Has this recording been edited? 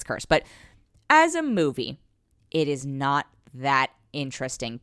no; 0 cuts

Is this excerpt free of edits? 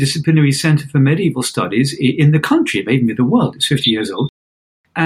yes; 0 cuts

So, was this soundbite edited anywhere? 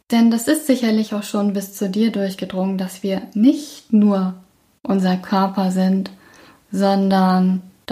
no; 0 cuts

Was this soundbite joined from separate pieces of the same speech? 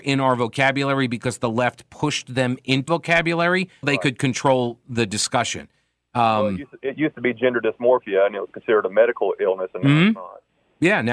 yes; 2 cuts; at 2.9 s, 3.8 s

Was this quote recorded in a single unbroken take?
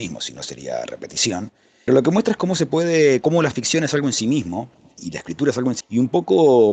no; 4 cuts; at 1.9 s, 3.2 s, 5.0 s, 5.8 s

